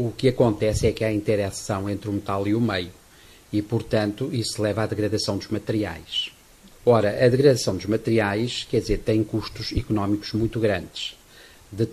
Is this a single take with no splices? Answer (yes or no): yes